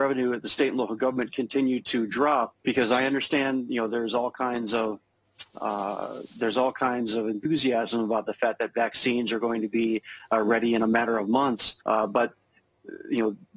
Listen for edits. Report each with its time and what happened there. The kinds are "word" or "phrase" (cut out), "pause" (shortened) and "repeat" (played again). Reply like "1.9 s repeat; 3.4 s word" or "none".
2.6 s pause; 11.8 s pause